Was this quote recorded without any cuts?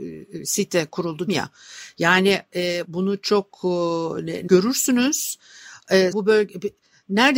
no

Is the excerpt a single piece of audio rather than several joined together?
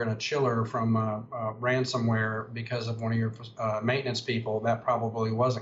yes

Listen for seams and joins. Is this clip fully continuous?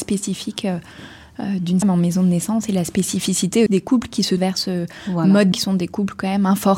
no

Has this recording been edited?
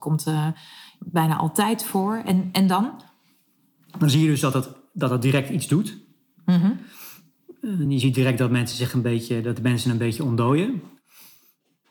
no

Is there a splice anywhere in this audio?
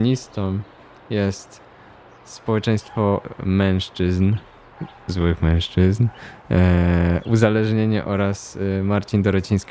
no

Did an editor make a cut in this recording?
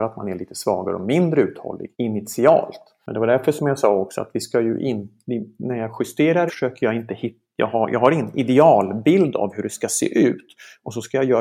yes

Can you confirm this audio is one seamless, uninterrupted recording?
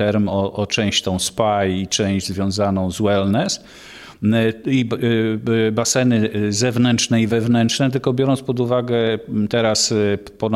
yes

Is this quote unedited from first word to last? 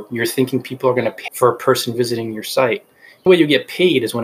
no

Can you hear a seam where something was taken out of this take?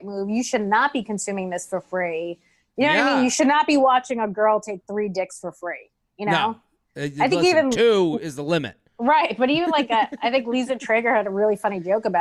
yes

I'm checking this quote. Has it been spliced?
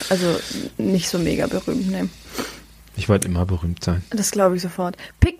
no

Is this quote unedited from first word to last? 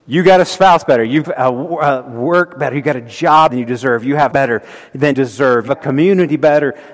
no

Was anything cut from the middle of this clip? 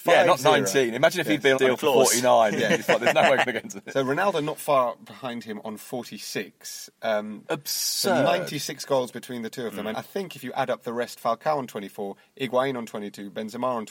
yes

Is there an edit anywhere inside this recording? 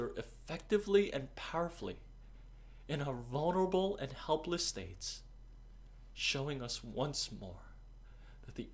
no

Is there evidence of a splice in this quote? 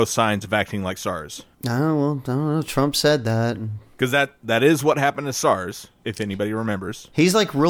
yes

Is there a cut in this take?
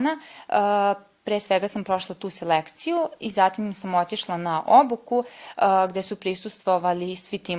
no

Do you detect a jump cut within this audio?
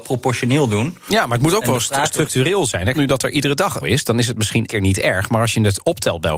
yes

